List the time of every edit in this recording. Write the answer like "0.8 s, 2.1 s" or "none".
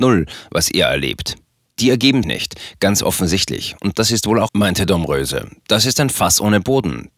2.2 s, 4.5 s